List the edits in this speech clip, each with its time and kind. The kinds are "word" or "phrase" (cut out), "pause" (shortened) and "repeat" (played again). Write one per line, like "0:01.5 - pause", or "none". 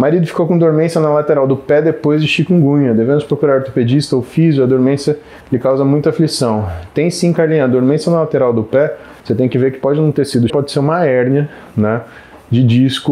0:05.4 - pause
0:09.2 - pause
0:10.5 - word